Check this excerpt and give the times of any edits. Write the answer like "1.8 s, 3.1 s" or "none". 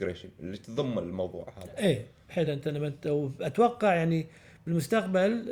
2.5 s